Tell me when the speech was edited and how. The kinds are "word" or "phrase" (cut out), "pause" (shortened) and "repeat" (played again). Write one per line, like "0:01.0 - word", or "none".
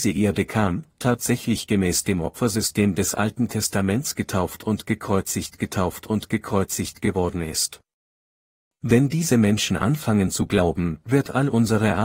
0:05.6 - repeat

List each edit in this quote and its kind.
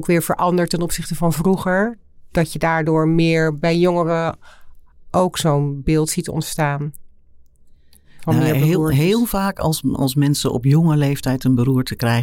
none

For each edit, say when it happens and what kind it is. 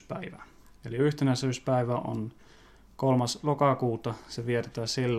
none

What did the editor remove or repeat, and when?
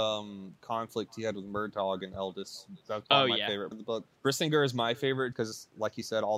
0:03.7 - word
0:04.2 - pause
0:05.3 - word

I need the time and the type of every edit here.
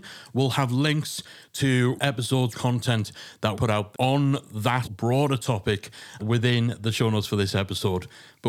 0:02.0 - word
0:02.5 - word
0:03.5 - word
0:03.9 - word
0:04.8 - word
0:06.2 - word

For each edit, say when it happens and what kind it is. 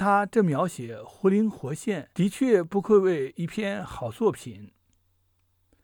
0:02.1 - pause

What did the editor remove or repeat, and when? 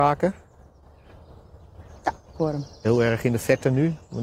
0:01.9 - pause

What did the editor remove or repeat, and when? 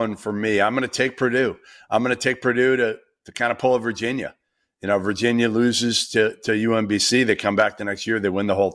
none

